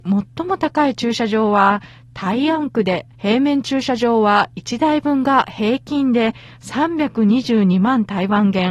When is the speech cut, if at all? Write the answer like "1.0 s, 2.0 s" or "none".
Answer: 3.1 s

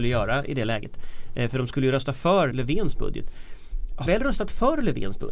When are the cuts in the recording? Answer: 2.5 s, 4.1 s

